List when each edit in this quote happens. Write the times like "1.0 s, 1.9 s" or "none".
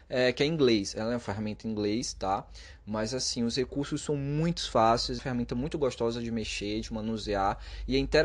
5.2 s